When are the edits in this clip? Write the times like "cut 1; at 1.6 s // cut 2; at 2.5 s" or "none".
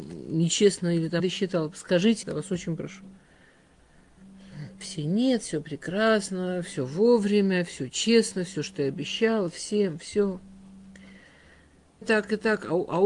cut 1; at 1.2 s // cut 2; at 2.2 s // cut 3; at 12.0 s